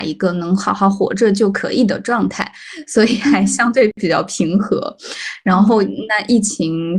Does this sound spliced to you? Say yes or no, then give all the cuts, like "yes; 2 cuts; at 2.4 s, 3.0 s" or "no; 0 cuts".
no; 0 cuts